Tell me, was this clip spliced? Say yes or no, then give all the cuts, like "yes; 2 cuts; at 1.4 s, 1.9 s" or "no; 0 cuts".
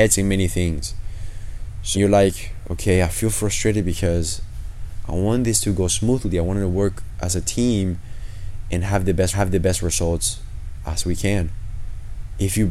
yes; 2 cuts; at 1.9 s, 9.3 s